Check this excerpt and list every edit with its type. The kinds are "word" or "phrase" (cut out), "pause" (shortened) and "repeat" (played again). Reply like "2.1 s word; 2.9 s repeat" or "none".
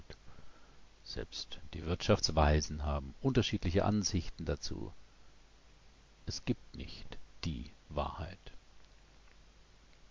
none